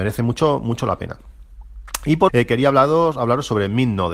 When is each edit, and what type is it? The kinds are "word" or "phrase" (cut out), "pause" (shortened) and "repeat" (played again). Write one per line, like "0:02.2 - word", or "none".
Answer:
0:02.3 - word